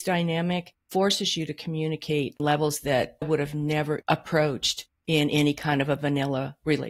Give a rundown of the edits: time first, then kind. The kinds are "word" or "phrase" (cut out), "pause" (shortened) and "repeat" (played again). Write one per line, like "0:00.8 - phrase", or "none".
0:02.4 - word
0:03.2 - word
0:04.0 - word